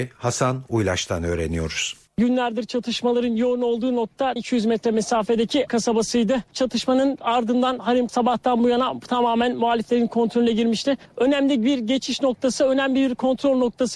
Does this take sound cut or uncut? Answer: cut